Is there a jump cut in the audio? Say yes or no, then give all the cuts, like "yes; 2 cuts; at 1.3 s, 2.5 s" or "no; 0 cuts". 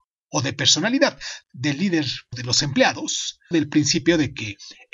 yes; 3 cuts; at 1.4 s, 2.3 s, 3.5 s